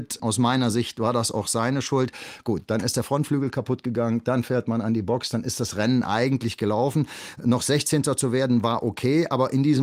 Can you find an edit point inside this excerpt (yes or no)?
no